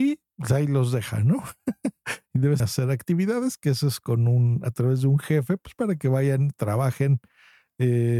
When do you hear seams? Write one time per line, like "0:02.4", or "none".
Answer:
0:02.6